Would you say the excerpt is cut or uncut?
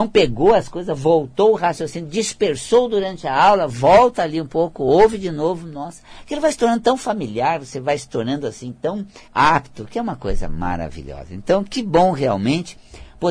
cut